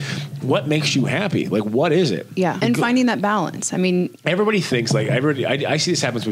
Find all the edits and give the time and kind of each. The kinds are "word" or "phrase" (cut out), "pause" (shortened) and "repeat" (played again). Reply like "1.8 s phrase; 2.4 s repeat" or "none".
2.6 s word